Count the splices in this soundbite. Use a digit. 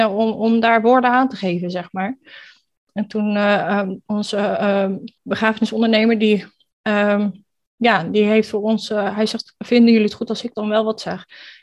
1